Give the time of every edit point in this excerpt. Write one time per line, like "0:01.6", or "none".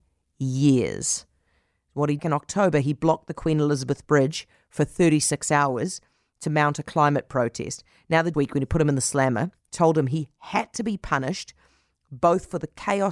0:02.2
0:08.3